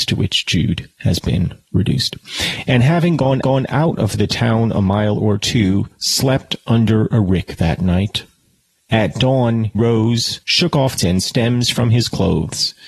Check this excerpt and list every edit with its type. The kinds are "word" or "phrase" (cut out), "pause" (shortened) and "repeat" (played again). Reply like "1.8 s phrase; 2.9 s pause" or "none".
3.4 s repeat; 9.7 s word; 10.4 s pause; 11.0 s phrase